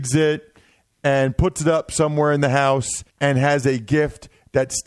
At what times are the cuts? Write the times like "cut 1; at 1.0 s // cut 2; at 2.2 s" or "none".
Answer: cut 1; at 3.1 s